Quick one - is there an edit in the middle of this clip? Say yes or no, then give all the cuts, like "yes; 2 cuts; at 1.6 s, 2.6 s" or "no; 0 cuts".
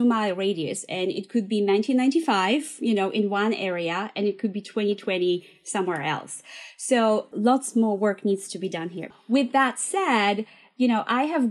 no; 0 cuts